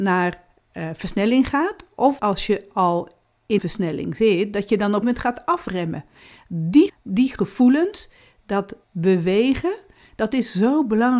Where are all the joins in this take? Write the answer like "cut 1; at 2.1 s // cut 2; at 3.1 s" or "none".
cut 1; at 2.2 s // cut 2; at 3.6 s // cut 3; at 5.0 s // cut 4; at 6.9 s // cut 5; at 8.8 s